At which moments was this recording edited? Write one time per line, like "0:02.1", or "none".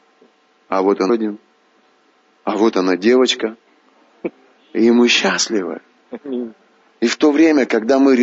0:01.1